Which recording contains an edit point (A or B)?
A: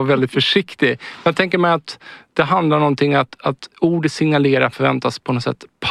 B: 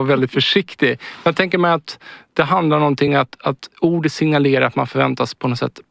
A